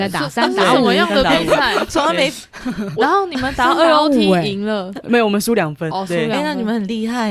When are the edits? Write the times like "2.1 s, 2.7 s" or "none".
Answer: 5.9 s